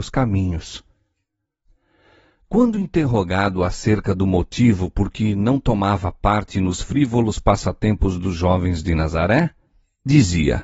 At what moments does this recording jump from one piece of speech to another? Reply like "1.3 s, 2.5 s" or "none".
none